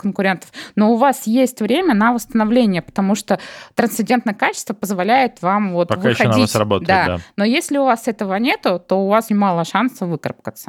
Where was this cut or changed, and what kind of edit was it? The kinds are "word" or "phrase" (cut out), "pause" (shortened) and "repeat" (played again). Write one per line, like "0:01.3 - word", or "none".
0:09.3 - word